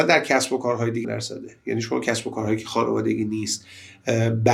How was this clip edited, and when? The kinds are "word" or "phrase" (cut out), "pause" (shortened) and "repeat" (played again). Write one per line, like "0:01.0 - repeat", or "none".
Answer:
0:01.0 - word